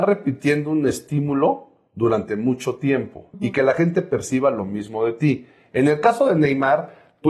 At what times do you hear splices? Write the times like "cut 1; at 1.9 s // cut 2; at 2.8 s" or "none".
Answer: cut 1; at 3.3 s